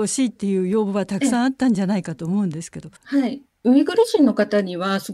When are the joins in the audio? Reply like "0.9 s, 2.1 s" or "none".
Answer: 3.0 s